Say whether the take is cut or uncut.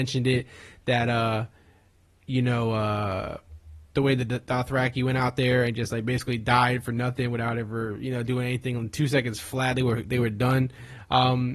uncut